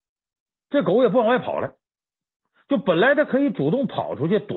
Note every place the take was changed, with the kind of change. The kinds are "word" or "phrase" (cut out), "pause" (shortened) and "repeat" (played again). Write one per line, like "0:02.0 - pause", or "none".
none